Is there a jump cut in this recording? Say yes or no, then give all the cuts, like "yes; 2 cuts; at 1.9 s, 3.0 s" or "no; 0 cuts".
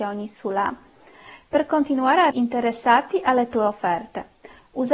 yes; 1 cut; at 2.3 s